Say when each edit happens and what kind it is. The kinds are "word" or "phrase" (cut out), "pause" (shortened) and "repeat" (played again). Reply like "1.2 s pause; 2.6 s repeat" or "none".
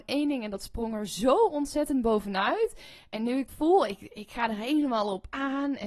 3.5 s word

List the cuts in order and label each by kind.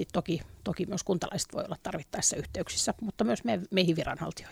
none

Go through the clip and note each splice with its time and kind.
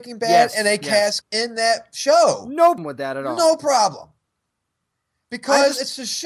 1.2 s word; 2.8 s word

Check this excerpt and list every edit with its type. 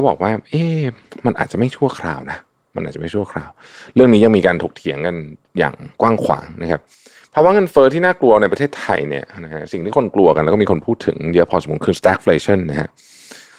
none

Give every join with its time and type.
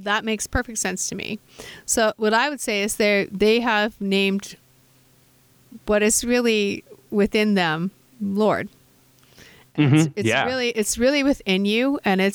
none

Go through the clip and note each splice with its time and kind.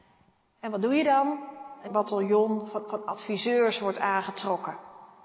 1.9 s word; 2.9 s repeat

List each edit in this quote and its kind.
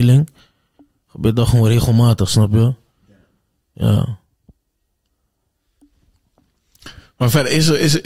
none

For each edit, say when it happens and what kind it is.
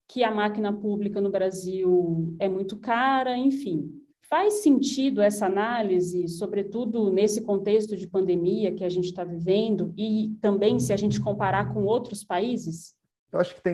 4.1 s pause

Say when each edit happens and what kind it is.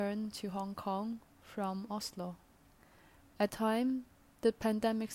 3.5 s word

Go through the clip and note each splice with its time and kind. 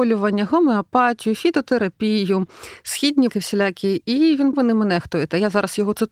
3.3 s word; 4.5 s phrase

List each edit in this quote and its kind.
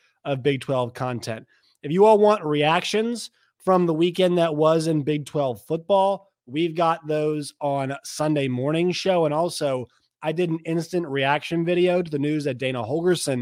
none

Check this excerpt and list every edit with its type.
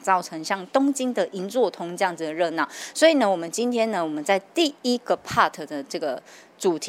none

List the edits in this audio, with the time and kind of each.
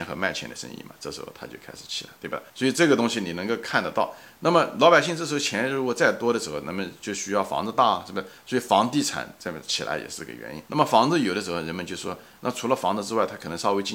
2.2 s pause; 2.5 s pause; 10.7 s pause

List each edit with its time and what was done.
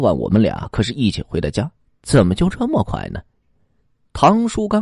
none

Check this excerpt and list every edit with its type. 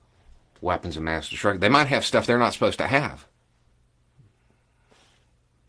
none

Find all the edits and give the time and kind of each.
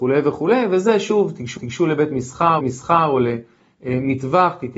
1.6 s repeat; 2.6 s repeat

